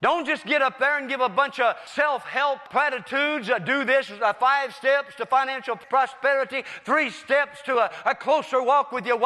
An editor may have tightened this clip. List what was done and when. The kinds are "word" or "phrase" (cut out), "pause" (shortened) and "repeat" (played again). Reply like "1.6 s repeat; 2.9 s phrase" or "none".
none